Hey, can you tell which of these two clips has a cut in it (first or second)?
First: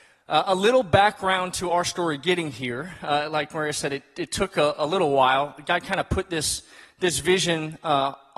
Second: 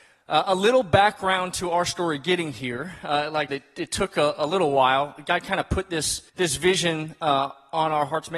second